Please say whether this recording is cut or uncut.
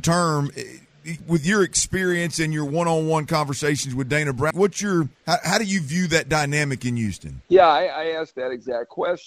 cut